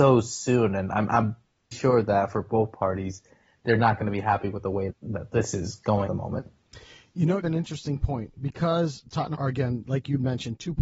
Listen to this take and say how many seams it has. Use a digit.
5